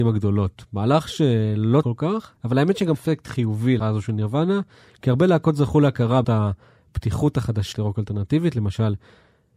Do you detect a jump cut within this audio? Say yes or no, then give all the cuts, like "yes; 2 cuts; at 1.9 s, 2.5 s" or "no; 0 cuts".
yes; 6 cuts; at 1.8 s, 2.4 s, 2.9 s, 3.8 s, 6.2 s, 7.7 s